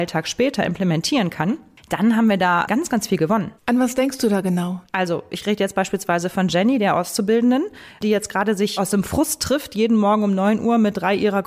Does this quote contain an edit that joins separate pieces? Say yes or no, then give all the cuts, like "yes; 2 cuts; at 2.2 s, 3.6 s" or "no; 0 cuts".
yes; 1 cut; at 3.6 s